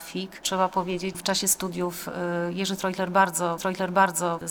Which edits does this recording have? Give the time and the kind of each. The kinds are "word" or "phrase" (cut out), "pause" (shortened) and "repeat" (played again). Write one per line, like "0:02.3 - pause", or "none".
0:01.1 - word
0:03.6 - repeat